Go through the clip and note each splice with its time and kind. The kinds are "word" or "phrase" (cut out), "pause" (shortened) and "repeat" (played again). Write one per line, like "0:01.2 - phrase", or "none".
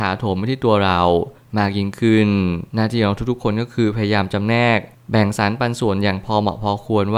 0:02.7 - pause